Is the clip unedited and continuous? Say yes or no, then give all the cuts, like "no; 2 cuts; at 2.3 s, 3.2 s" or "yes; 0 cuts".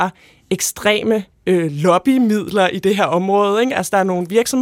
yes; 0 cuts